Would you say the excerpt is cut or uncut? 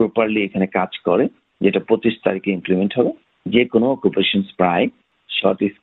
uncut